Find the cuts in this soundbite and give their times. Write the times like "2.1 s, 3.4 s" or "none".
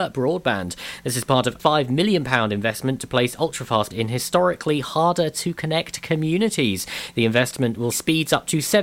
1.6 s, 3.9 s, 7.9 s